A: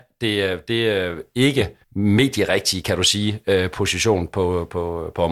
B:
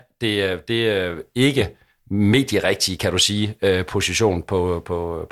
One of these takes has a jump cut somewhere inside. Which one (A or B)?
A